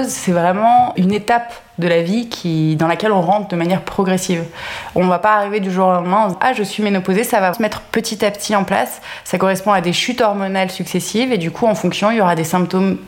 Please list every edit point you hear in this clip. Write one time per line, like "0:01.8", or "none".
0:01.0
0:06.3
0:07.5